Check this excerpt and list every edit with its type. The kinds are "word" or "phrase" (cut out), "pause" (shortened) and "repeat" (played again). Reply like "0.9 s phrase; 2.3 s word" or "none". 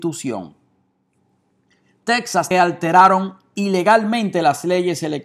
2.5 s phrase